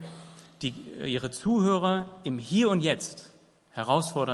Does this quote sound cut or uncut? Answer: uncut